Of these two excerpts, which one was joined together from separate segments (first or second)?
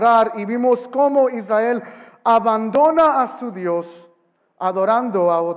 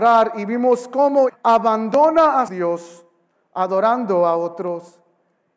second